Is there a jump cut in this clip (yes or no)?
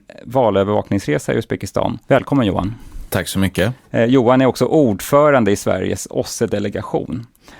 yes